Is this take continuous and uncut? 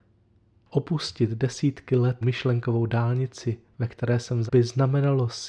no; 2 cuts; at 2.2 s, 4.5 s

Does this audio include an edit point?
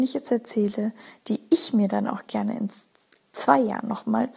no; 0 cuts

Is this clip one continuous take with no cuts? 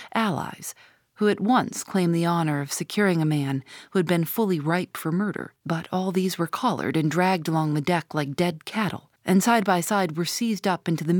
no; 2 cuts; at 5.6 s, 9.2 s

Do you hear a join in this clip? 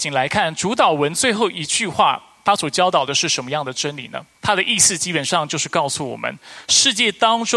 yes; 1 cut; at 4.3 s

